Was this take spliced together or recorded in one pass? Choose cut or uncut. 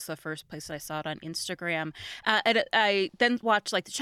uncut